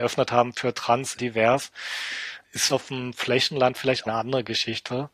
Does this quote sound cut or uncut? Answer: cut